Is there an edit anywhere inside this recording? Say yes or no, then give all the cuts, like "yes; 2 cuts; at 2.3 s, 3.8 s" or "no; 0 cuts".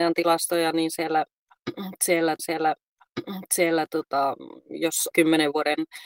yes; 2 cuts; at 2.4 s, 5.1 s